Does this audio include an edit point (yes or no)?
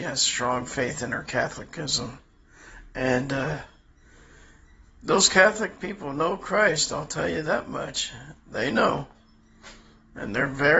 no